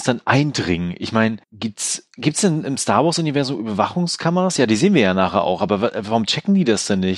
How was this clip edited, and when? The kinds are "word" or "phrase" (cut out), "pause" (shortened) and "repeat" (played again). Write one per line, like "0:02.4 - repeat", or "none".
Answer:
0:01.4 - pause